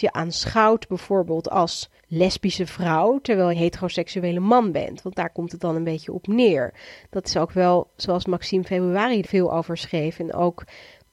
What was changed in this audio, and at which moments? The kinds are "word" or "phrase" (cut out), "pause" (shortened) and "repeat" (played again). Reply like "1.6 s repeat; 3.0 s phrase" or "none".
2.0 s pause; 3.5 s phrase; 9.2 s word